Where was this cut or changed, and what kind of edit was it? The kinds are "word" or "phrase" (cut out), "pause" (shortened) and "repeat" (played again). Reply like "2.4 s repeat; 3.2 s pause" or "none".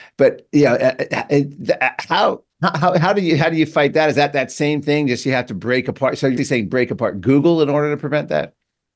2.5 s pause; 6.4 s word

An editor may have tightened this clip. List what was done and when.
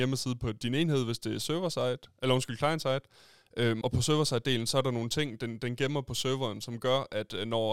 3.8 s word

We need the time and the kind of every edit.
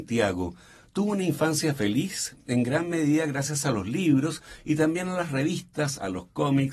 none

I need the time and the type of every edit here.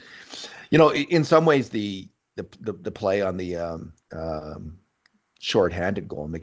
4.0 s pause

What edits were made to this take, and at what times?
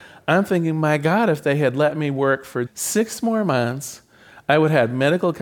2.7 s word

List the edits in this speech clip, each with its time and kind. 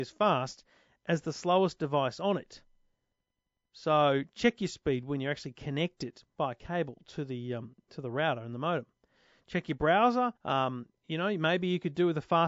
10.4 s pause

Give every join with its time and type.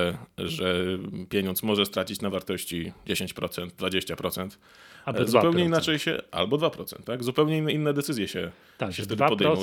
none

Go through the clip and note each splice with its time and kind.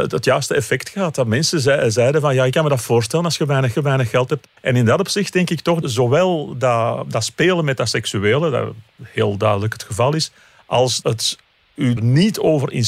3.7 s repeat; 4.6 s pause; 5.8 s word; 11.0 s word; 12.0 s word

